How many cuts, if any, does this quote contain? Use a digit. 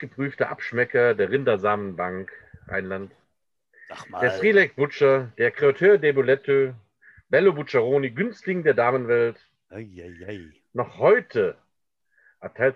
0